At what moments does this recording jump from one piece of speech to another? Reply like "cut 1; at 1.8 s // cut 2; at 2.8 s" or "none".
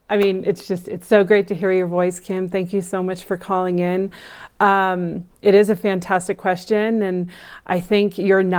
none